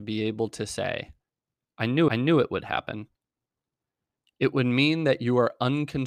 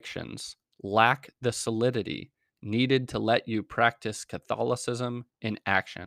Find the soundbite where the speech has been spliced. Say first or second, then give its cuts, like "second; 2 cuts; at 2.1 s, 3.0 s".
first; 1 cut; at 2.1 s